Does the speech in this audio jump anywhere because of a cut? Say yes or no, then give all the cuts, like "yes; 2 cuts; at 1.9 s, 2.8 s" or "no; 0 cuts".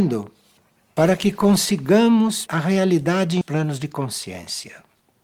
yes; 2 cuts; at 2.5 s, 3.4 s